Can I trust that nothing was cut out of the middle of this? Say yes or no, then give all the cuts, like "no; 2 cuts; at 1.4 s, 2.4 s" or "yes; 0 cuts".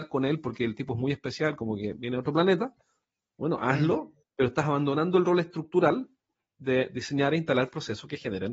yes; 0 cuts